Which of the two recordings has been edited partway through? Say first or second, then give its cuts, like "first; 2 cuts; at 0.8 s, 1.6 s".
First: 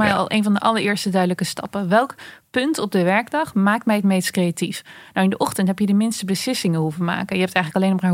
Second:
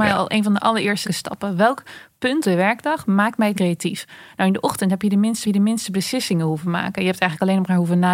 second; 4 cuts; at 1.0 s, 2.4 s, 3.5 s, 5.4 s